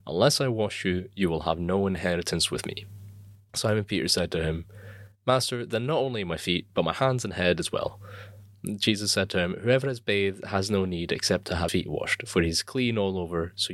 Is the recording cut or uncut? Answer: cut